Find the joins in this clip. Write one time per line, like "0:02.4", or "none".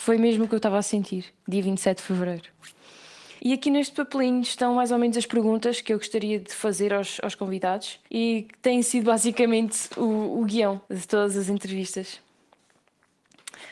0:03.4
0:08.1
0:10.8